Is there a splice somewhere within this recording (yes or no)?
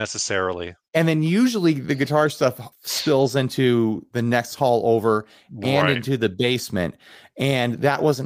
yes